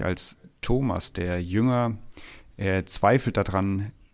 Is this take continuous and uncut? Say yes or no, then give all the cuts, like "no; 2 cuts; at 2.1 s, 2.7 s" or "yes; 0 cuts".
yes; 0 cuts